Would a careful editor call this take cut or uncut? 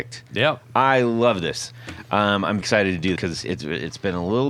cut